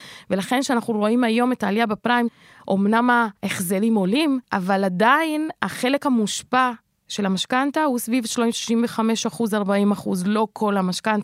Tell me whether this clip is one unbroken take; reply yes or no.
no